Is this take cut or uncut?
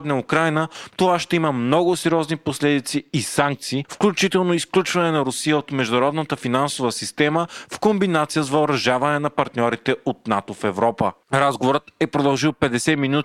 uncut